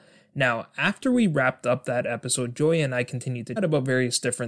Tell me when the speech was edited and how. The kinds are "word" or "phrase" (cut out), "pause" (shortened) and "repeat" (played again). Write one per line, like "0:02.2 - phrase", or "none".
0:03.6 - word